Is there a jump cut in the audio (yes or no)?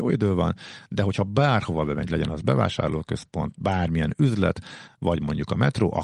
no